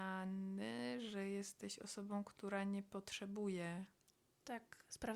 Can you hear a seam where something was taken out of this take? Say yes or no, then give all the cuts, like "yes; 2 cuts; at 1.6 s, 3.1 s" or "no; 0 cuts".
no; 0 cuts